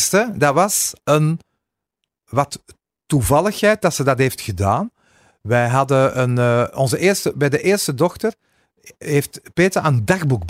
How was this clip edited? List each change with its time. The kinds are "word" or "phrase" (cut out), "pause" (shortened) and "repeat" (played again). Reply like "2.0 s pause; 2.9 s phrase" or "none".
none